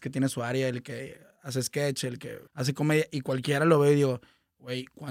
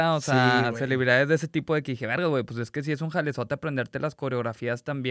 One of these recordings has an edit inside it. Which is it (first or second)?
first